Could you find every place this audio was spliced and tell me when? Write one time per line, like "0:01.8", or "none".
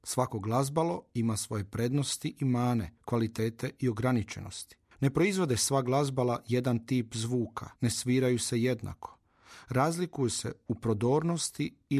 0:03.0
0:04.9
0:07.8